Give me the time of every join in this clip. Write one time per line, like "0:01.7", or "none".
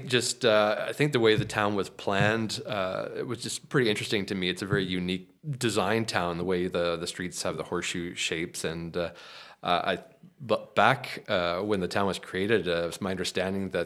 0:05.4

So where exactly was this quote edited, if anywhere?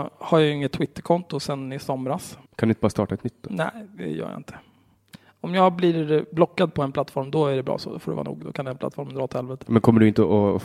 0:02.5

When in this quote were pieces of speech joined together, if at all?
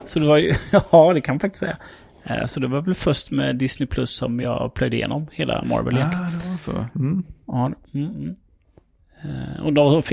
none

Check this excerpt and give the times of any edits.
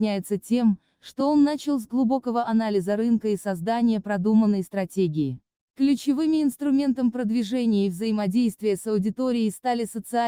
none

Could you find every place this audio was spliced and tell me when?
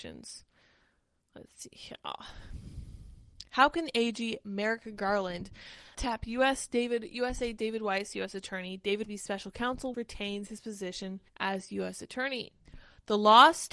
0:05.9
0:09.0
0:09.9
0:11.3

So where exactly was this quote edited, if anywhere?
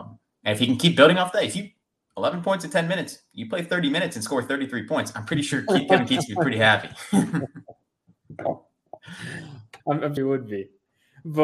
0:02.0
0:09.8
0:10.2

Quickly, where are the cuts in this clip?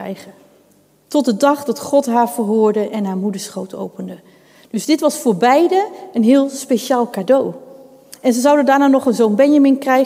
none

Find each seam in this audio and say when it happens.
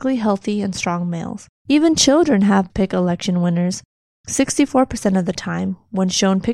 0:01.6
0:02.7

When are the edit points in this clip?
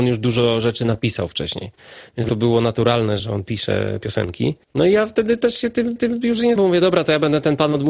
0:02.3
0:03.2
0:04.6
0:06.0
0:06.6

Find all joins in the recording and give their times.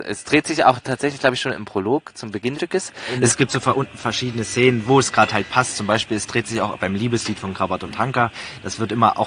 0:02.5

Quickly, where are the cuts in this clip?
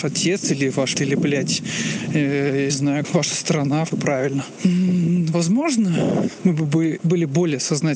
0:00.9
0:02.7
0:03.0
0:03.9
0:06.4

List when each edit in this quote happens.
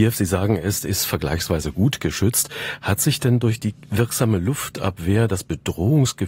none

